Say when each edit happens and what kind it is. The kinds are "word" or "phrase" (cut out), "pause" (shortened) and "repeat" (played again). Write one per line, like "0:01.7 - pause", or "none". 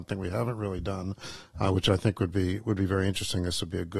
none